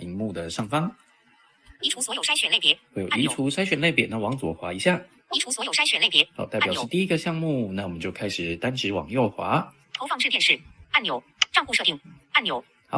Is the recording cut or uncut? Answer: cut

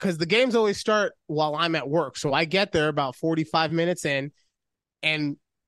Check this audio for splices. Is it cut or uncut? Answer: uncut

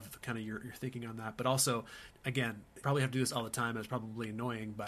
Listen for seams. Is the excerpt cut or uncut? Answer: cut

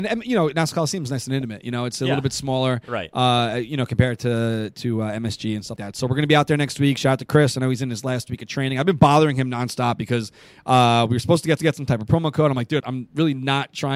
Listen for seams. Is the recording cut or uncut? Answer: cut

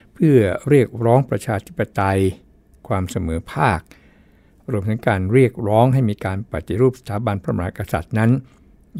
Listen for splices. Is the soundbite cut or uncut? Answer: uncut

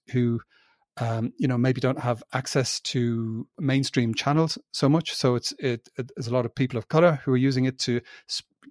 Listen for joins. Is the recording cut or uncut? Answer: uncut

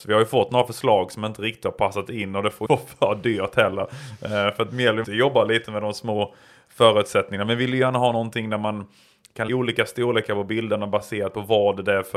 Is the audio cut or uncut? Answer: cut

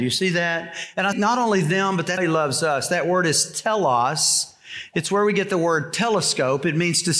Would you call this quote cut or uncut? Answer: cut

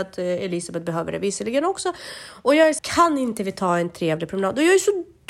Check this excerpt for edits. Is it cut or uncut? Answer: cut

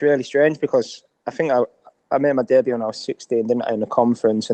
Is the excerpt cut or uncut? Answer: uncut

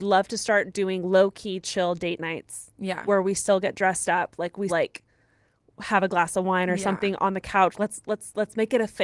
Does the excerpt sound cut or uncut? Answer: cut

